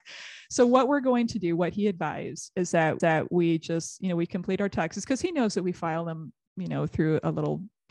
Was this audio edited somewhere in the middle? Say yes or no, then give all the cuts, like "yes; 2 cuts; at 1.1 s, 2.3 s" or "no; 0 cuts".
yes; 1 cut; at 3.0 s